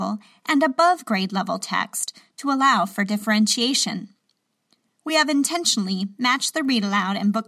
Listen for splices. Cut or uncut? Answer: uncut